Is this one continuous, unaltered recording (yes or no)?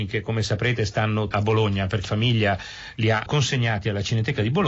no